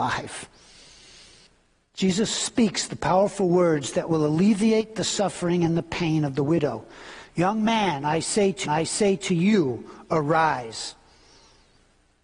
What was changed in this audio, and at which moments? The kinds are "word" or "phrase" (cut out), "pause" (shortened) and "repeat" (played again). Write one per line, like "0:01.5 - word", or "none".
0:08.6 - repeat